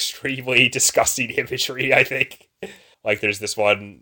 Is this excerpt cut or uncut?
cut